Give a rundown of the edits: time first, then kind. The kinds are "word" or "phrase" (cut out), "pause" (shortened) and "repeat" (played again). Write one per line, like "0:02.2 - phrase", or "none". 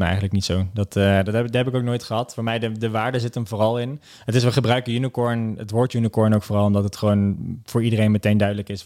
none